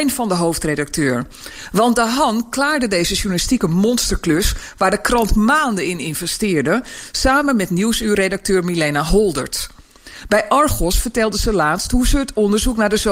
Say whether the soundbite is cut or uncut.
uncut